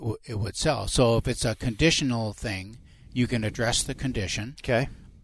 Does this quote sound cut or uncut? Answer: uncut